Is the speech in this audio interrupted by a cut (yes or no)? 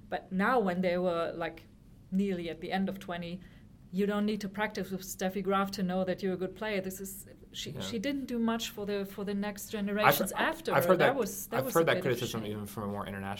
no